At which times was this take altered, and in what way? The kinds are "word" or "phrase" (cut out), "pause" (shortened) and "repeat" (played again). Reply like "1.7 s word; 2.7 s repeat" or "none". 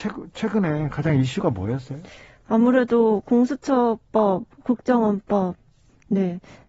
none